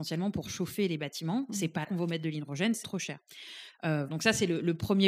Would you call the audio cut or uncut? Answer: cut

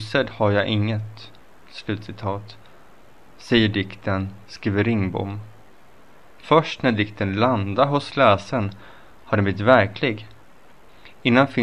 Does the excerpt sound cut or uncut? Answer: uncut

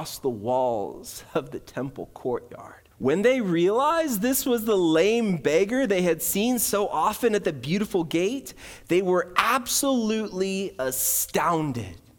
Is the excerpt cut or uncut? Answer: cut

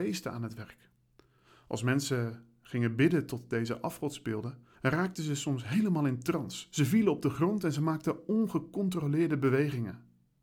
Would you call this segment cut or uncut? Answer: cut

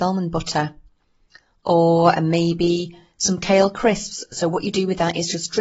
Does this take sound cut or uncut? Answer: uncut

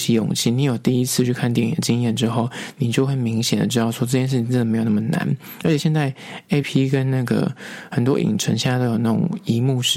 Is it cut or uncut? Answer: cut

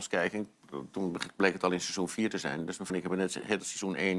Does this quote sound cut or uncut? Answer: cut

